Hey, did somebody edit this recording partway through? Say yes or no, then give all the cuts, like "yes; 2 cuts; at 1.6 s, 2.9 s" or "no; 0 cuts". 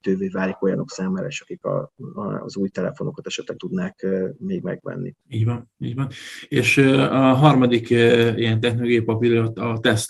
yes; 2 cuts; at 3.6 s, 5.2 s